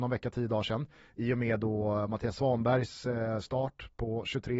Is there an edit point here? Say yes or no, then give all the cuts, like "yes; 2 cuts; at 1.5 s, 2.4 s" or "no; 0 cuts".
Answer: no; 0 cuts